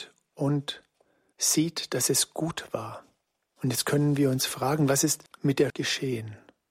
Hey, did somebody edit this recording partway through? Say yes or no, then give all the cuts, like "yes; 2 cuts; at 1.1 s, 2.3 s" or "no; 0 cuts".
yes; 1 cut; at 5.7 s